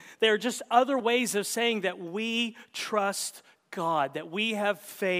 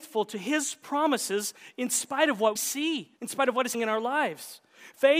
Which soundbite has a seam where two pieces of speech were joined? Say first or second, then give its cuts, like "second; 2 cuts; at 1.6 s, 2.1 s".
second; 3 cuts; at 2.6 s, 3.2 s, 3.7 s